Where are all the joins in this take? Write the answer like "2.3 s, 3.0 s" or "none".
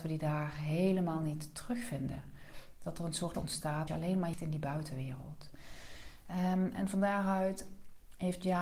3.3 s, 3.9 s, 4.3 s